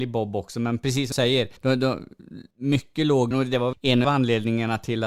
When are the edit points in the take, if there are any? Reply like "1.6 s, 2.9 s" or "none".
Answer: 1.1 s, 1.6 s, 2.5 s, 3.3 s, 3.7 s, 4.0 s

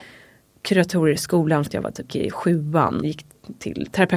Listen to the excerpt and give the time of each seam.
1.7 s, 2.1 s, 3.0 s

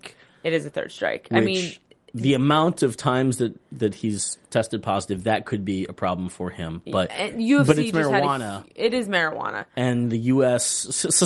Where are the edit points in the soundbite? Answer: none

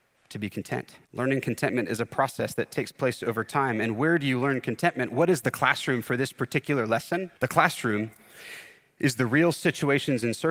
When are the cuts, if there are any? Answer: 1.0 s, 7.4 s

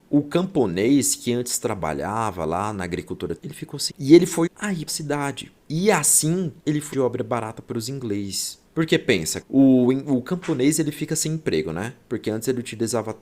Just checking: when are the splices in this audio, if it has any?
3.4 s, 3.9 s, 4.5 s, 4.9 s, 5.6 s, 6.6 s, 6.9 s, 8.7 s, 9.4 s

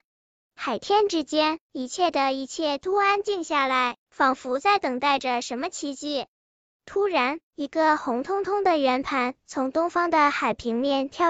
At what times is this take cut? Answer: none

